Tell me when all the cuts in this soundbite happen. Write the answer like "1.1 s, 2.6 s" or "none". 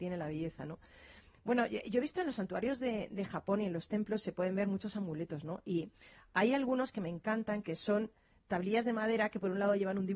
none